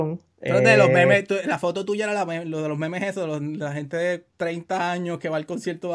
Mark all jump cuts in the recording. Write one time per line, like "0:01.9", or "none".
0:04.3